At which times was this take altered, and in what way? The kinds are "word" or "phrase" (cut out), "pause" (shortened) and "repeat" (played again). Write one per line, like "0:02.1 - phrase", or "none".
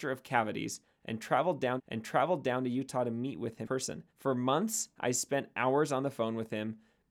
0:01.8 - repeat
0:03.6 - word
0:04.1 - pause

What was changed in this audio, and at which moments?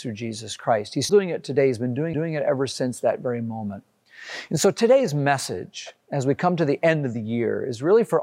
0:01.1 - word
0:02.1 - repeat

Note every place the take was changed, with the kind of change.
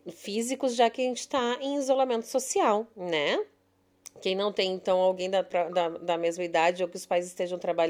none

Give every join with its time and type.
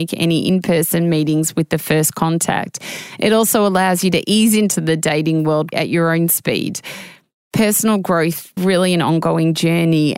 0:05.7 - word
0:08.6 - word

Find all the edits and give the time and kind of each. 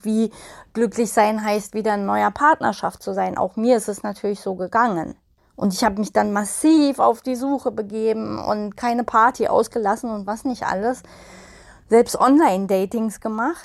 none

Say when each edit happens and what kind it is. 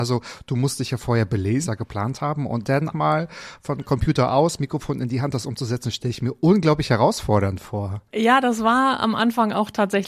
0:01.7 - phrase
0:02.9 - word
0:08.1 - pause

